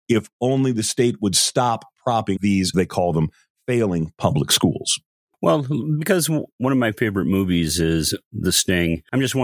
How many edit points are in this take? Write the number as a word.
two